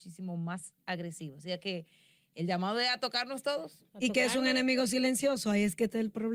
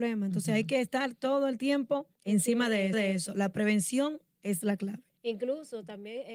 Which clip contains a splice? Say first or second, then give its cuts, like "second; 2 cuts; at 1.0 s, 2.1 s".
second; 2 cuts; at 2.1 s, 2.9 s